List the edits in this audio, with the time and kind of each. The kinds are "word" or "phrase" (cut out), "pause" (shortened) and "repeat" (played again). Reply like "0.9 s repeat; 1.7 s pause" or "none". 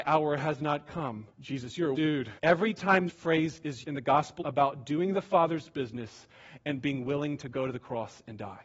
1.3 s pause; 2.0 s word; 2.4 s pause; 3.1 s word; 3.8 s word; 4.4 s phrase